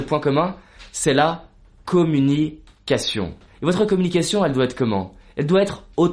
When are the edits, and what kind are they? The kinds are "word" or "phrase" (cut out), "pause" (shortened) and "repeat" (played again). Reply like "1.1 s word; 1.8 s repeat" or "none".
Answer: 3.5 s pause